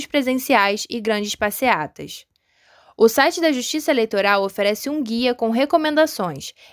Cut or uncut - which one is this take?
uncut